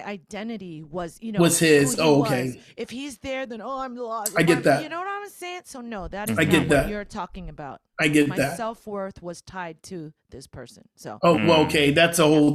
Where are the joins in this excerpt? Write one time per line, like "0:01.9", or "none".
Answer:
none